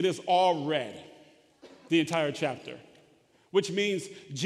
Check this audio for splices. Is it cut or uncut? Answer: uncut